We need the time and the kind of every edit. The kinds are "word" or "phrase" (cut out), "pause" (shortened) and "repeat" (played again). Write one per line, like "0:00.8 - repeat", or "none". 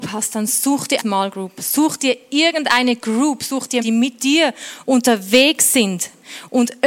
0:01.0 - word
0:03.8 - word